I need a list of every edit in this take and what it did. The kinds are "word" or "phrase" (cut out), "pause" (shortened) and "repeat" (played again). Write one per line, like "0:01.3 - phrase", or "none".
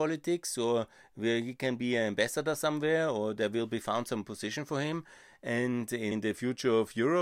0:06.1 - word